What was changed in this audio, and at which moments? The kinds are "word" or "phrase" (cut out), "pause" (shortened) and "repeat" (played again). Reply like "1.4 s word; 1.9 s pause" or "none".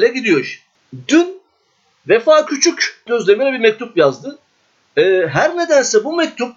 3.1 s word